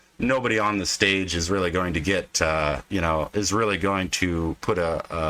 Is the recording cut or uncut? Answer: uncut